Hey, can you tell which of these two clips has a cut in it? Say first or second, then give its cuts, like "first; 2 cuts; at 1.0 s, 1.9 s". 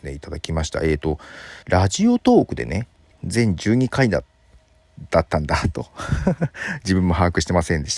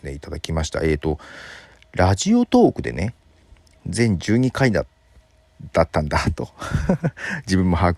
first; 2 cuts; at 1.6 s, 3.1 s